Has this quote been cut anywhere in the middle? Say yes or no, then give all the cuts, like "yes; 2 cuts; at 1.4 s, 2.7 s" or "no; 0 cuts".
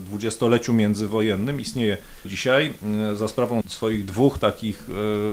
yes; 2 cuts; at 2.2 s, 3.6 s